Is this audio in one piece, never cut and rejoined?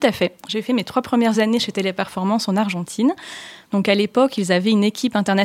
yes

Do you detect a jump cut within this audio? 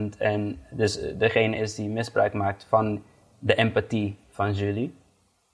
no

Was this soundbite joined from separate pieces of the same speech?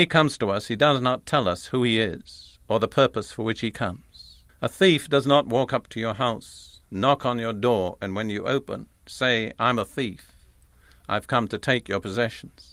yes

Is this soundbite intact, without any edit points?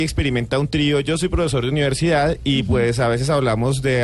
yes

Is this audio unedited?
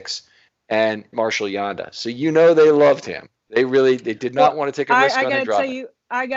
no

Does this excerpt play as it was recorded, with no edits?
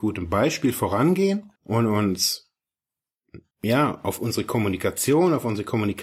no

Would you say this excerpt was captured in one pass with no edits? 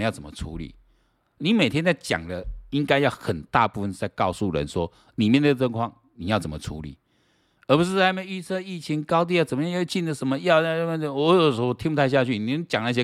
yes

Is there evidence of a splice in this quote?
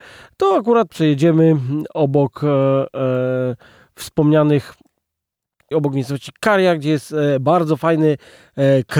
yes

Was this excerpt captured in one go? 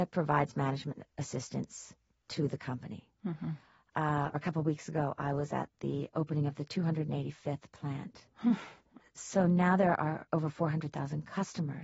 yes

